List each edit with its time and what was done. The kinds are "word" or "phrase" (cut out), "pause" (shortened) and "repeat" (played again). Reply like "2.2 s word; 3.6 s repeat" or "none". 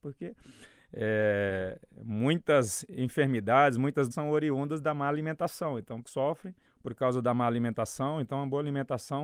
4.1 s word; 6.0 s word; 6.7 s pause